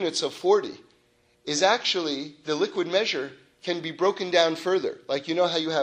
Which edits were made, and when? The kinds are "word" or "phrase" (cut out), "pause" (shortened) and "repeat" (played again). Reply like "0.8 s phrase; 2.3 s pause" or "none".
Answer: none